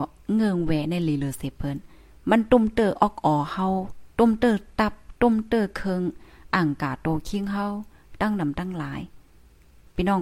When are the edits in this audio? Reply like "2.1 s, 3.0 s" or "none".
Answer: 4.1 s